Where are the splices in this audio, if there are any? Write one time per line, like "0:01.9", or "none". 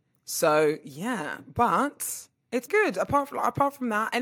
0:02.7

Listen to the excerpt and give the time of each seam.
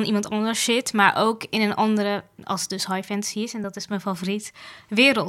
none

